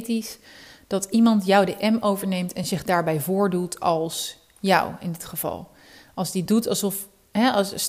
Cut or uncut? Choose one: uncut